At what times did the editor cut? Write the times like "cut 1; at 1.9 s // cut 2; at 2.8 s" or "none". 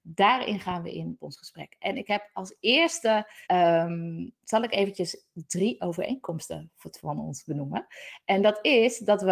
cut 1; at 1.2 s // cut 2; at 3.4 s